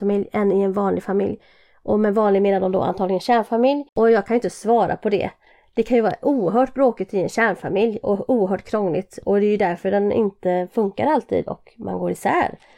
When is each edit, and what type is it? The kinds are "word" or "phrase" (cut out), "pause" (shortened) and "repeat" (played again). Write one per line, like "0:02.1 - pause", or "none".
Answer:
0:03.9 - pause